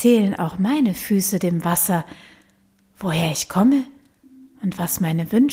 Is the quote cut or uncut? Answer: uncut